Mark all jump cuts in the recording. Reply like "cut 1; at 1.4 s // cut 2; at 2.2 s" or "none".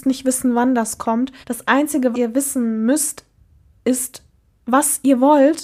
cut 1; at 1.4 s // cut 2; at 2.1 s